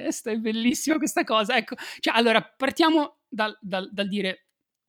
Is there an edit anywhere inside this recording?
no; 0 cuts

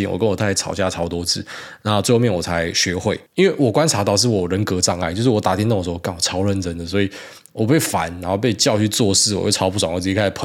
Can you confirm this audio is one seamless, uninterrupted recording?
no; 1 cut; at 3.3 s

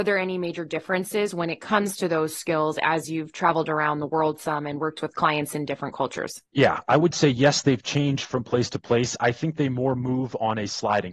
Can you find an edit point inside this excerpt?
yes; 1 cut; at 6.5 s

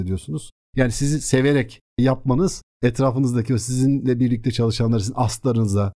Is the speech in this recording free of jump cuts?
yes; 0 cuts

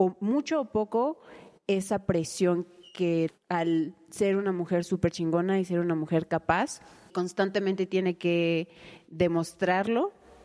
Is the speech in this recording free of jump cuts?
no; 2 cuts; at 3.3 s, 7.1 s

